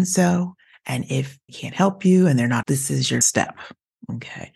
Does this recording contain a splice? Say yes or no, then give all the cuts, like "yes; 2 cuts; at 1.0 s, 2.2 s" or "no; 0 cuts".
yes; 3 cuts; at 1.5 s, 2.6 s, 3.2 s